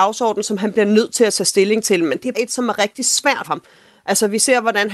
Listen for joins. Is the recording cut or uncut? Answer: cut